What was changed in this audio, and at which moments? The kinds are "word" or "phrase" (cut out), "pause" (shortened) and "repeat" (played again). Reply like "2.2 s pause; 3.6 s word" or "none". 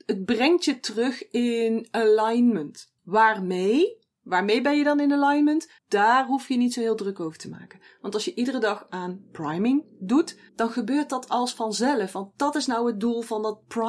3.0 s pause; 5.8 s pause; 10.5 s pause